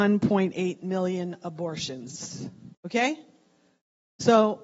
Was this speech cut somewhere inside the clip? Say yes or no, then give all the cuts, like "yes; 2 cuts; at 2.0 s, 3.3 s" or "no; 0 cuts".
yes; 1 cut; at 2.7 s